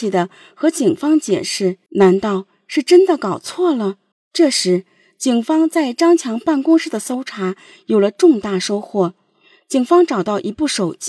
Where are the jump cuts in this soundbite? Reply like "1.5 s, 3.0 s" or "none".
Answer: 1.9 s, 4.1 s